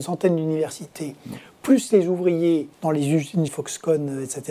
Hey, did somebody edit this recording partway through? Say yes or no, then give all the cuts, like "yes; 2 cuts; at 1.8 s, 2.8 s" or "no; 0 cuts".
yes; 2 cuts; at 2.7 s, 3.5 s